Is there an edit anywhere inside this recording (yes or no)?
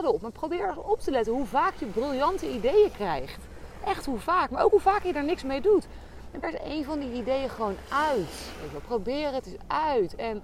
yes